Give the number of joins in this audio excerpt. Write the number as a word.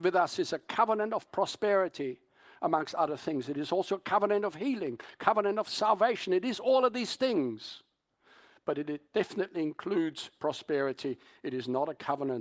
zero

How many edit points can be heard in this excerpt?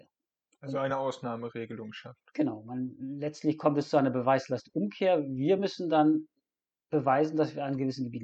zero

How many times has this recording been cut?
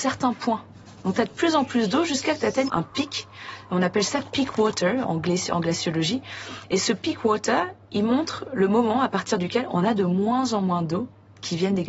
two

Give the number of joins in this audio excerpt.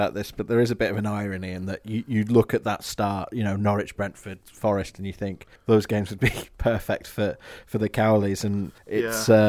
zero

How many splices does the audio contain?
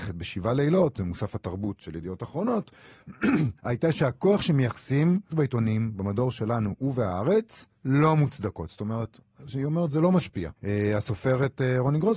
four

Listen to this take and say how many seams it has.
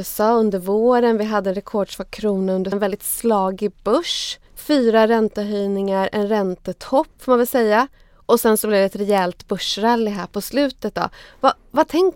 one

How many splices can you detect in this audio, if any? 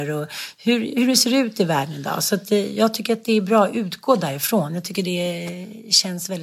zero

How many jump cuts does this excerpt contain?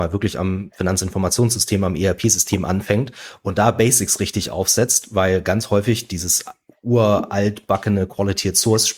zero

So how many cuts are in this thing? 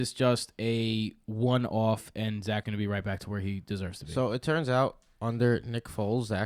one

